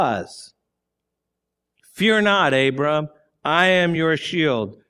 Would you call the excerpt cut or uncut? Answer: uncut